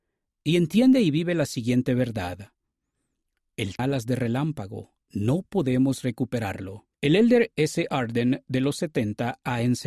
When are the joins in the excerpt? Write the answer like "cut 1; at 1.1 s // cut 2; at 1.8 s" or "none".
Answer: cut 1; at 3.8 s // cut 2; at 5.0 s // cut 3; at 6.9 s // cut 4; at 7.5 s